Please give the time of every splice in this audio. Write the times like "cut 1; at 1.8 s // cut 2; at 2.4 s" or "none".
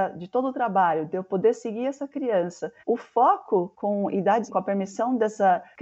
cut 1; at 2.8 s // cut 2; at 4.5 s